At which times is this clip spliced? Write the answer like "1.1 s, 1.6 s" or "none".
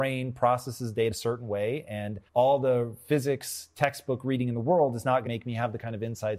1.1 s, 2.3 s, 5.3 s